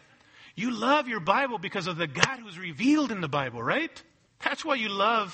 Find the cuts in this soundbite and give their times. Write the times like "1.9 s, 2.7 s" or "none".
4.3 s